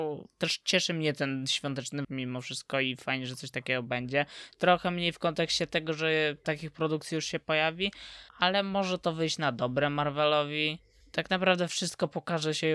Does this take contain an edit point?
yes; 3 cuts; at 2.0 s, 6.4 s, 8.3 s

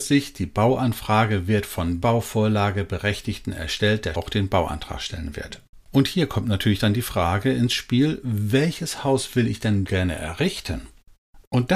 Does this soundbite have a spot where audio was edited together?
yes; 4 cuts; at 2.0 s, 4.1 s, 5.7 s, 9.9 s

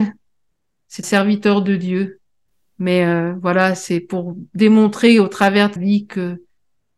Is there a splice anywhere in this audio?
yes; 3 cuts; at 1.0 s, 2.5 s, 5.8 s

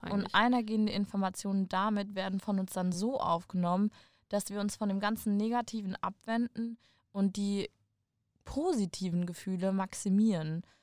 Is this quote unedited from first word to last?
yes; 0 cuts

